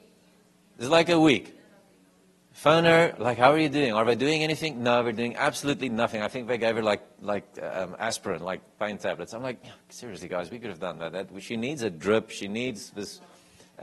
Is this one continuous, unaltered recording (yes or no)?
yes